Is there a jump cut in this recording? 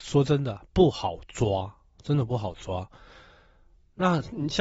no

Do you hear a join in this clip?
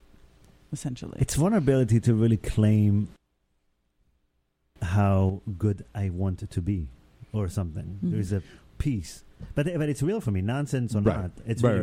no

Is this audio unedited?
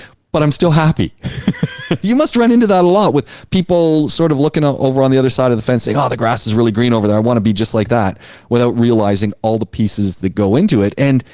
yes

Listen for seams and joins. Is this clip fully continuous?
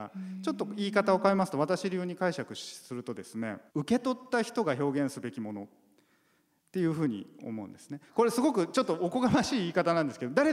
no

